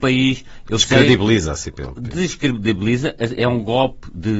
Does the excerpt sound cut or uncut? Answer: uncut